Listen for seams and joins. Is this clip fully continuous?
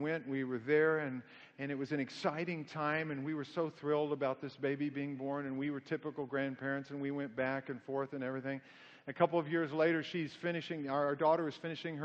yes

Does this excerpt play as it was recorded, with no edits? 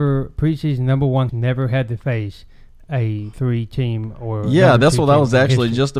no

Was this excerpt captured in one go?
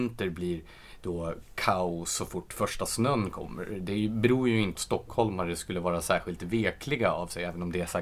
no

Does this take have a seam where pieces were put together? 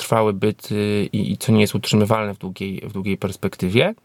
no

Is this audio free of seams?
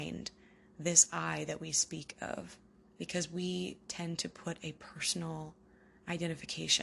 no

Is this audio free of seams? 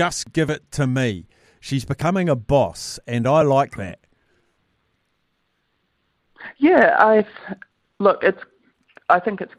yes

